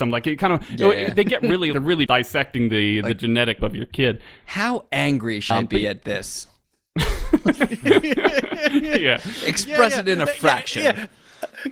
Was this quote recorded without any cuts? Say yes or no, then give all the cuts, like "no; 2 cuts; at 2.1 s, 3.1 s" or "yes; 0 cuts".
no; 4 cuts; at 1.7 s, 2.1 s, 3.6 s, 5.5 s